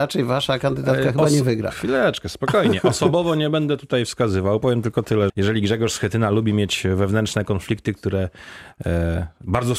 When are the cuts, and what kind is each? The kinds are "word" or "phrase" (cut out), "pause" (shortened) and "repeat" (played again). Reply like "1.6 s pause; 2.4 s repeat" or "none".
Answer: 5.3 s word